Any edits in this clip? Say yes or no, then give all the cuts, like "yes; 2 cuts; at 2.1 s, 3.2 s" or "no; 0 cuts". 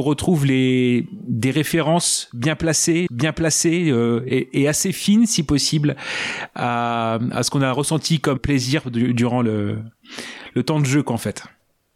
yes; 3 cuts; at 3.1 s, 7.3 s, 8.4 s